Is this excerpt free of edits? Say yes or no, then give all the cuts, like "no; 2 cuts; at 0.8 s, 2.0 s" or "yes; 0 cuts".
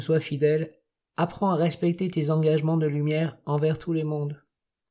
yes; 0 cuts